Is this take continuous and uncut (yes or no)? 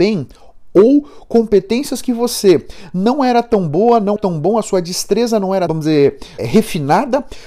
no